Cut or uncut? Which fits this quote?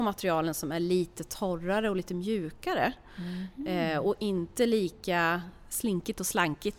uncut